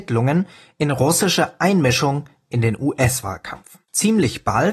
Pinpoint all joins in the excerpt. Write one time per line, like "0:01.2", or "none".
0:03.8